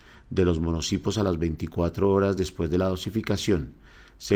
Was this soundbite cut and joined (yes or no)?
no